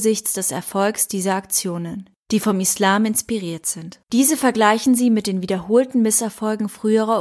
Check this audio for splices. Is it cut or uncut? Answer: cut